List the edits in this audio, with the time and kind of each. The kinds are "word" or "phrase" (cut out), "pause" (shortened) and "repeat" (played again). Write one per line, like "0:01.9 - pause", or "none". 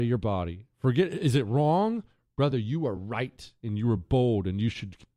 none